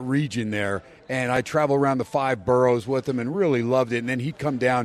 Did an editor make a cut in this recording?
no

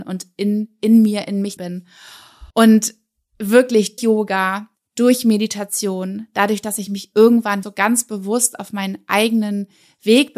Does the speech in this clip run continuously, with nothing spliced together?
no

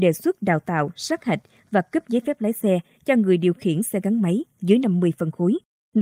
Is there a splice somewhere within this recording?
no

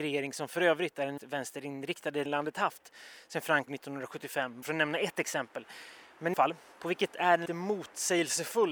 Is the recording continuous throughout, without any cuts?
no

